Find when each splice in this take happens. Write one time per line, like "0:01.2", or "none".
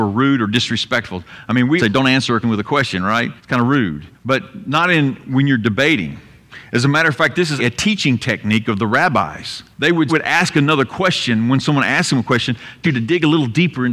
0:01.8
0:02.4
0:03.4
0:04.1
0:07.6
0:09.7
0:10.1
0:12.8